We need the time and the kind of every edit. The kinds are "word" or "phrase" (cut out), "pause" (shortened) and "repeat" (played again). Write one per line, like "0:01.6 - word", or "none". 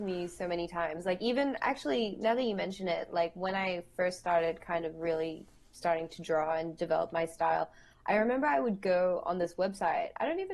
none

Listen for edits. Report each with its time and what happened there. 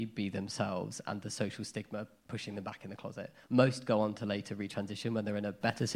none

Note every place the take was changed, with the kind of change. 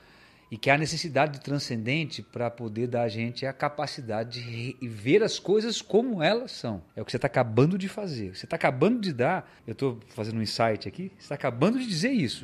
0:06.9 - pause
0:09.6 - pause

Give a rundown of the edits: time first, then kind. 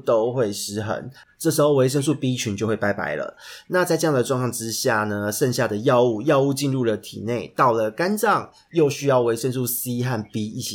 none

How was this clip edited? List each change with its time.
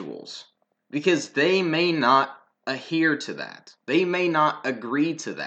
0:03.8 - pause

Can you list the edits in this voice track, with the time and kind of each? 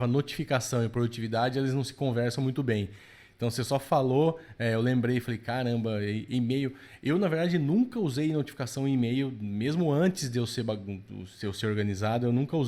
none

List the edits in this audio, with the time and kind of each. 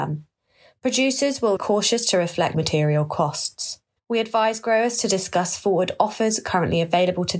0:01.6 - word
0:02.5 - word
0:04.0 - pause

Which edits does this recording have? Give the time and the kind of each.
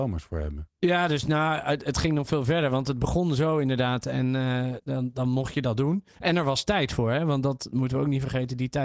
0:06.1 - pause

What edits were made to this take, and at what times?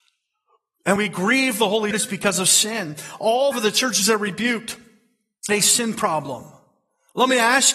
0:01.0 - word
0:01.9 - word
0:03.5 - word
0:05.5 - word

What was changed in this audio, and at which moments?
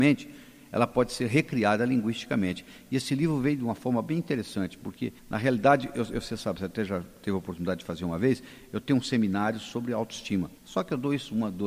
0:05.2 - pause
0:10.6 - pause

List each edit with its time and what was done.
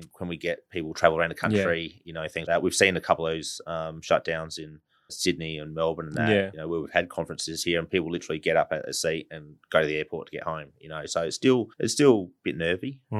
0:02.4 - word
0:05.1 - word
0:11.7 - pause

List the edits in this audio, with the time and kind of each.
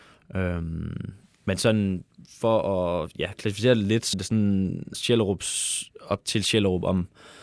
0:04.1 - word
0:04.9 - word

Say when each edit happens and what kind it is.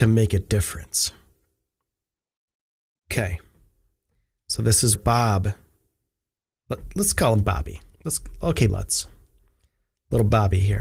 0:05.0 - word
0:08.7 - word

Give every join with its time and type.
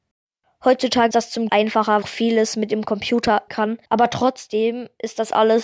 0:01.1 - word
0:01.5 - phrase
0:02.0 - phrase
0:03.5 - word
0:03.8 - pause

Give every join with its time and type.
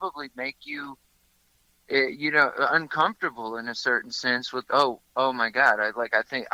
0:04.7 - word

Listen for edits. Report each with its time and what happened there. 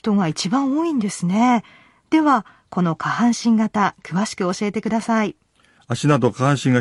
none

